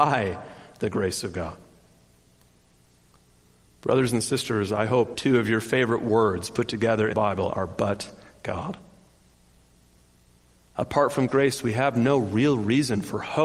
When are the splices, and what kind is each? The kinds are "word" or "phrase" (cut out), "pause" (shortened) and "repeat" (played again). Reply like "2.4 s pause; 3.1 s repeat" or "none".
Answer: 5.1 s word; 7.1 s word; 11.3 s word